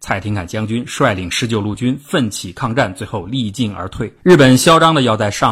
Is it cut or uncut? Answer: cut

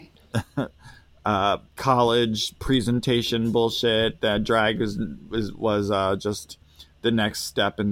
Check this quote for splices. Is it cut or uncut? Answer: cut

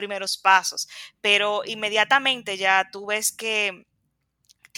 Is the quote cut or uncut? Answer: uncut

